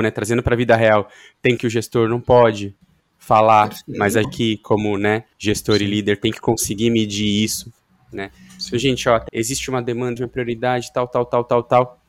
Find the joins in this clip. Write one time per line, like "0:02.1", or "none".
0:01.6
0:04.2
0:05.3
0:09.3
0:10.2